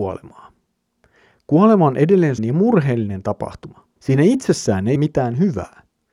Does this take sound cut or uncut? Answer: cut